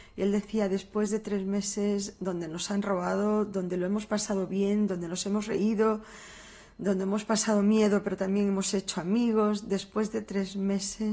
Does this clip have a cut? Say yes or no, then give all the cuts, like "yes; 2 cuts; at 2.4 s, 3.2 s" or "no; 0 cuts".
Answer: no; 0 cuts